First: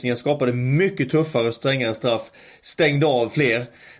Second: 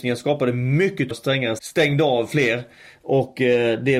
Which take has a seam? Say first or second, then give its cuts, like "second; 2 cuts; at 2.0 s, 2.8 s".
second; 2 cuts; at 1.1 s, 1.6 s